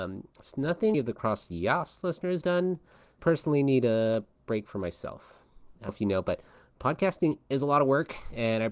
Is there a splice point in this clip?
yes; 4 cuts; at 0.9 s, 2.4 s, 3.2 s, 5.9 s

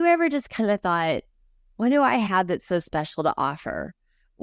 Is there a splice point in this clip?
no; 0 cuts

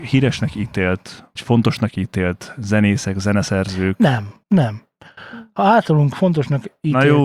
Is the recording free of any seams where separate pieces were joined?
no; 2 cuts; at 1.4 s, 4.4 s

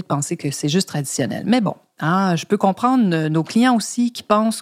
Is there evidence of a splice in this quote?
no; 0 cuts

